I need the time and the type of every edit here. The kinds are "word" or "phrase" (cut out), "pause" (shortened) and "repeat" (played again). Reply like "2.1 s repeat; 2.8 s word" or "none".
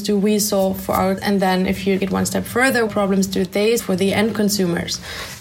1.2 s word; 2.0 s word; 2.9 s word; 3.8 s word